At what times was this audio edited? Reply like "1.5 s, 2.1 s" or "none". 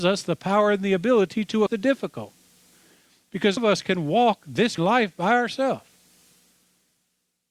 1.7 s, 3.6 s, 4.8 s